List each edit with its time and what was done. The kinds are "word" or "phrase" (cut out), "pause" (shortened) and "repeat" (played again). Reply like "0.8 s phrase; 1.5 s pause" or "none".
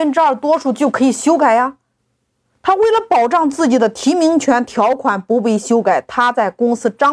2.0 s pause